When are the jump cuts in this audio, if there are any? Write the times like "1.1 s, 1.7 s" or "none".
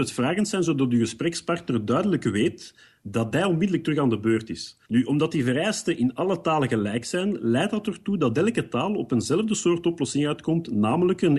4.8 s